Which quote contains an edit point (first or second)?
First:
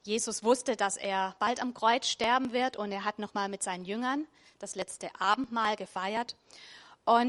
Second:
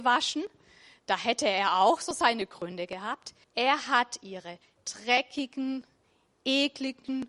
second